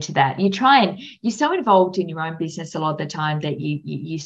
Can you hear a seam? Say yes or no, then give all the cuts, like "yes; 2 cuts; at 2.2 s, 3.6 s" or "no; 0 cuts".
no; 0 cuts